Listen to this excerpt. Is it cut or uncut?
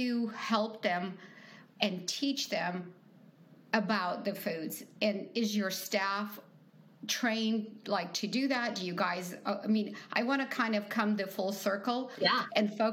uncut